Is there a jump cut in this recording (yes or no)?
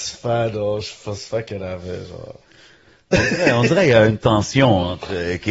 no